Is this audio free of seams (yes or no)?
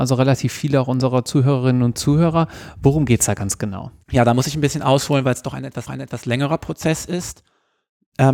no